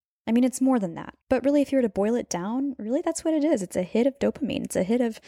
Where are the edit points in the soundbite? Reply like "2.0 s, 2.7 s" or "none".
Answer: 1.2 s